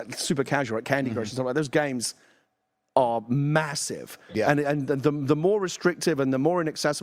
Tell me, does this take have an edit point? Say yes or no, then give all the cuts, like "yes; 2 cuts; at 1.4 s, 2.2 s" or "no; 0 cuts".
no; 0 cuts